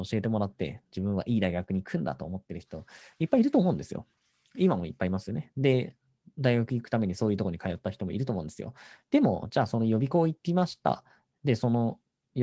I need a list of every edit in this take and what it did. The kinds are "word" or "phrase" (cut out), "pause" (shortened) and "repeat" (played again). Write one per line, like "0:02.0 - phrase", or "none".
none